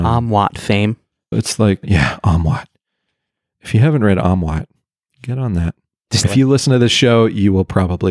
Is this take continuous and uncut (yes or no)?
no